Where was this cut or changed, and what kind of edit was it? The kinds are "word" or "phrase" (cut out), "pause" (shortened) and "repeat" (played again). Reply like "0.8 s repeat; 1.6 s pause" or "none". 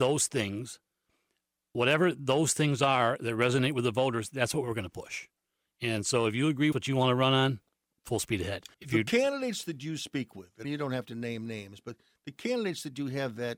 6.7 s phrase; 7.9 s pause; 8.7 s pause; 10.6 s word